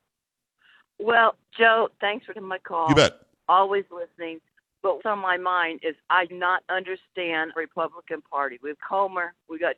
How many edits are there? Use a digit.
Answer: 6